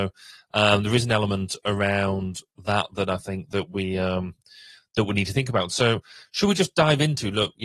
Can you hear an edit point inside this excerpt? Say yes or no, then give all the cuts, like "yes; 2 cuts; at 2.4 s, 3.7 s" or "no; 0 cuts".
no; 0 cuts